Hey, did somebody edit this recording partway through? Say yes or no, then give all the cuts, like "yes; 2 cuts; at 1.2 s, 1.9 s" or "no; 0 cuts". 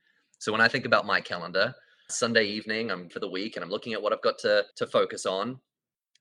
yes; 3 cuts; at 2.1 s, 3.1 s, 4.7 s